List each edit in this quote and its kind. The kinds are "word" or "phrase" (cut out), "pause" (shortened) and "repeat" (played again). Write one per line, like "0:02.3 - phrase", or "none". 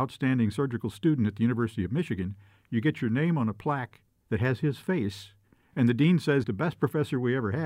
0:06.4 - word